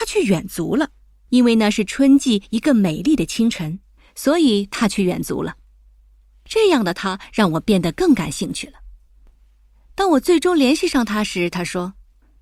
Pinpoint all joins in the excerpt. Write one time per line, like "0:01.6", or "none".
none